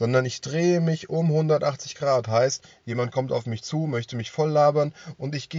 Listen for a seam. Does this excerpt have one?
no; 0 cuts

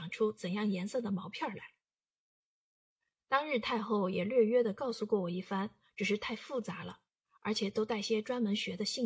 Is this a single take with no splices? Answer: yes; 0 cuts

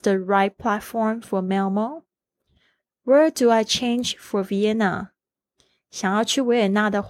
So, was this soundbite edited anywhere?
no; 0 cuts

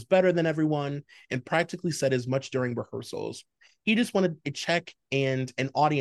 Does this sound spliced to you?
no; 0 cuts

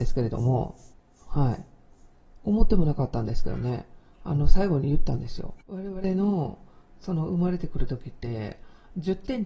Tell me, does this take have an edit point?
yes; 2 cuts; at 0.9 s, 5.6 s

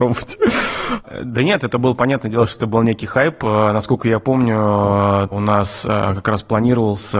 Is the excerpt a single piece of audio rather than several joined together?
no; 1 cut; at 5.3 s

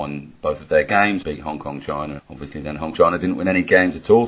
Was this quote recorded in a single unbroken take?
no; 3 cuts; at 1.2 s, 2.2 s, 2.9 s

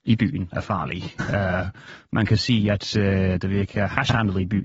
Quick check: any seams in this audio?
no; 0 cuts

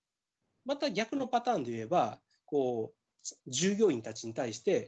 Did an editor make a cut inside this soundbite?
yes; 1 cut; at 3.4 s

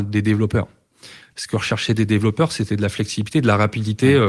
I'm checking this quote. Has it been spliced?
no; 0 cuts

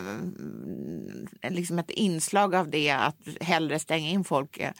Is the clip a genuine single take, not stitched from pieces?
yes; 0 cuts

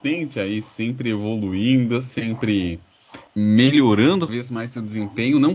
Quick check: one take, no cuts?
no; 2 cuts; at 3.3 s, 4.3 s

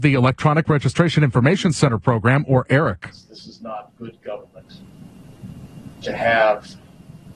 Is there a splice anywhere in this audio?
no; 0 cuts

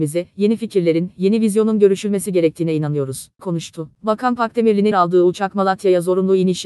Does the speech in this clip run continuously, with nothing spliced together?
no; 2 cuts; at 3.4 s, 4.9 s

